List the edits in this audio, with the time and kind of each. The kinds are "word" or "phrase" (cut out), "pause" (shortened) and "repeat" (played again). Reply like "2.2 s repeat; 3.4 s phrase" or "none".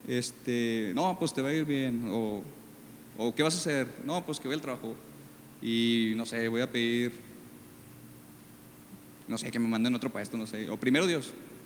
none